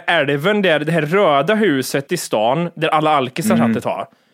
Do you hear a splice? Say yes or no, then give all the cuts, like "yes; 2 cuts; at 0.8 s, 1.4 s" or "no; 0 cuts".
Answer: yes; 1 cut; at 2.1 s